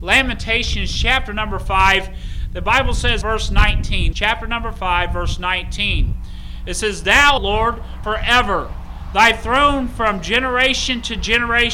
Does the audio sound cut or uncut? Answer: cut